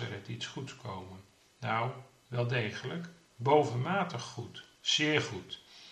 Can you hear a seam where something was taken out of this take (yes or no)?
no